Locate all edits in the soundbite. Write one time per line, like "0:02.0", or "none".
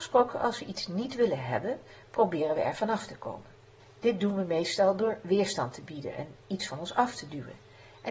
0:03.8